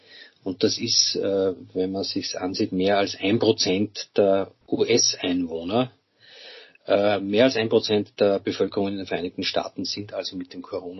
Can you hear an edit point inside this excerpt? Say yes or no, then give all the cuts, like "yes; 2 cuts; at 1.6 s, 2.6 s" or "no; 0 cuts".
yes; 1 cut; at 4.6 s